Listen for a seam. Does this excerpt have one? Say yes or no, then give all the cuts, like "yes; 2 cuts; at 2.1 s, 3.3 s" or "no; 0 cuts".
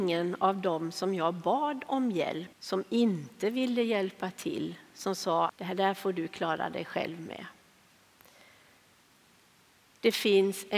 yes; 2 cuts; at 2.5 s, 5.5 s